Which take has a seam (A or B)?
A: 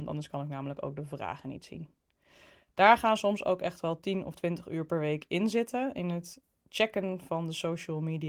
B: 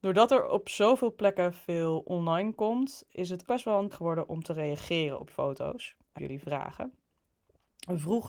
B